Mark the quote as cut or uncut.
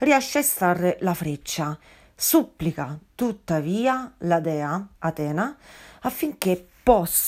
uncut